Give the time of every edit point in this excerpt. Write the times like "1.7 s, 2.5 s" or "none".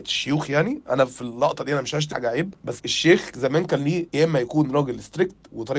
2.1 s, 2.8 s